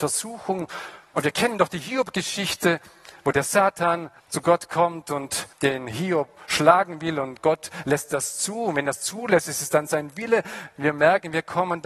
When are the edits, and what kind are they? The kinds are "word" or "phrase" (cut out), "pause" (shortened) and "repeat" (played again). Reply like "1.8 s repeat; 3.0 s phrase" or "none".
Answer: 4.2 s pause; 5.5 s pause